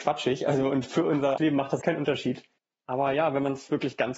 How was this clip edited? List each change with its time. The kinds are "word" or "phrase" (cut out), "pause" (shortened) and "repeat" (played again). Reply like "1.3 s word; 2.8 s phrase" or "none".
1.4 s word; 1.8 s word; 2.6 s pause